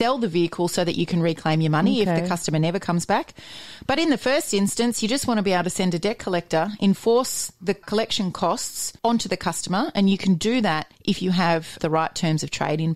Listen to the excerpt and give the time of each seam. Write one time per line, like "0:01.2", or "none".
0:07.8
0:09.0
0:10.9
0:11.8